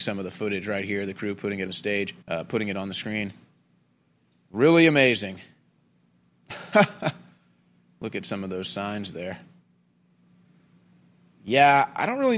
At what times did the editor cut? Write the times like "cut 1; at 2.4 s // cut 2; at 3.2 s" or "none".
cut 1; at 1.7 s // cut 2; at 2.2 s